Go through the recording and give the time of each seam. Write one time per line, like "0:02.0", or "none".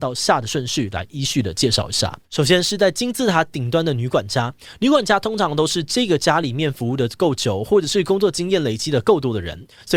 0:02.2